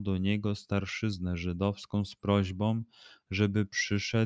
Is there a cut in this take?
no; 0 cuts

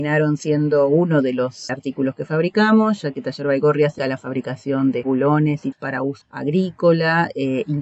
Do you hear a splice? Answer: yes; 5 cuts; at 1.7 s, 4.0 s, 5.0 s, 5.7 s, 6.2 s

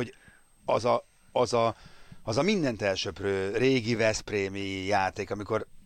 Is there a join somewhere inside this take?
no; 0 cuts

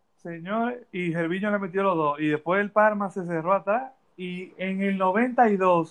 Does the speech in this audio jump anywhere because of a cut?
no; 0 cuts

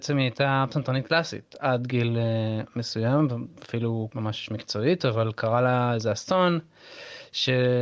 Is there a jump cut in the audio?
yes; 1 cut; at 4.1 s

